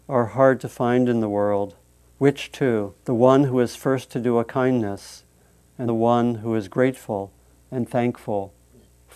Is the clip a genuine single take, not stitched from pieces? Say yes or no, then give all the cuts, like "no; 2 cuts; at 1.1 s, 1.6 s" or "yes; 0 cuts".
no; 2 cuts; at 3.0 s, 5.9 s